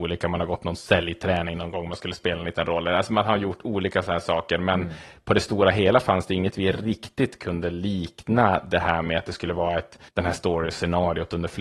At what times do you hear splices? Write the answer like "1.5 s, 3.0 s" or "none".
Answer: 10.1 s